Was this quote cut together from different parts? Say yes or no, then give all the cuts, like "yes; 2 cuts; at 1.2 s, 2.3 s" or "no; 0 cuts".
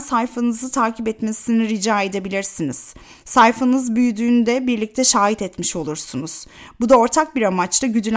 no; 0 cuts